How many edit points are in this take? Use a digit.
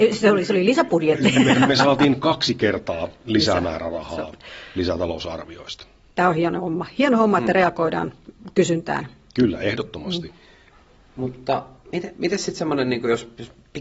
1